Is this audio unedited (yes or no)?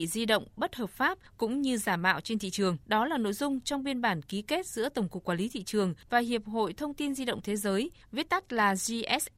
no